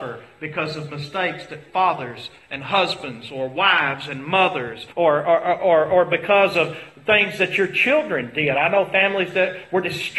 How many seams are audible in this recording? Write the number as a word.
one